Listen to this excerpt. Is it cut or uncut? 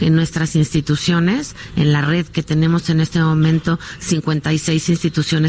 uncut